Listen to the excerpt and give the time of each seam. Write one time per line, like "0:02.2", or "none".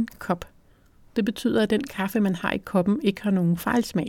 none

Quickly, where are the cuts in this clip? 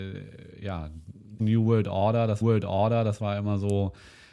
0:01.4
0:02.4

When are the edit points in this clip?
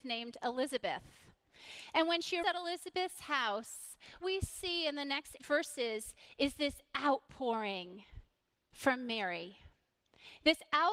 0:02.4
0:04.2
0:05.4
0:08.5

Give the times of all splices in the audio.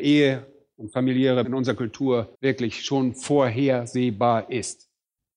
0:01.4
0:02.3

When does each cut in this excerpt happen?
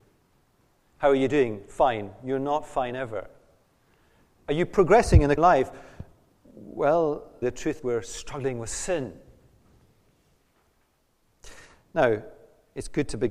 0:05.4
0:07.4
0:07.8

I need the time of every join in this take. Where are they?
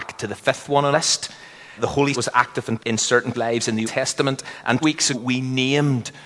0:00.9
0:01.8
0:02.1
0:02.8
0:03.3
0:03.8
0:04.8
0:05.1

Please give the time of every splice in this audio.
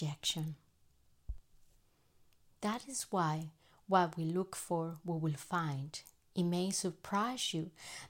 none

